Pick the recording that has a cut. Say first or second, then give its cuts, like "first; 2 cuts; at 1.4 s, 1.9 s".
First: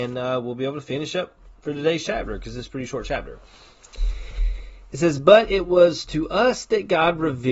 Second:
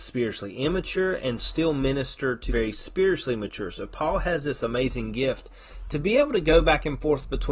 second; 1 cut; at 2.5 s